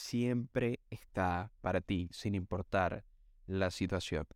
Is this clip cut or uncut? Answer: uncut